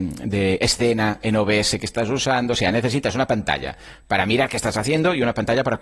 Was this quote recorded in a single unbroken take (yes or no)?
yes